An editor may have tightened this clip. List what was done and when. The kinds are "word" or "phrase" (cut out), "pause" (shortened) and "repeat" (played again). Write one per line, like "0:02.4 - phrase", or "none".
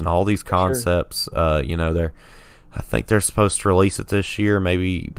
none